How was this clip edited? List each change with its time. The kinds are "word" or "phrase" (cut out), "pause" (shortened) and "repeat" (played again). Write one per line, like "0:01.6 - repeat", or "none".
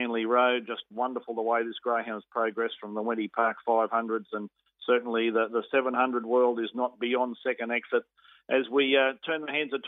none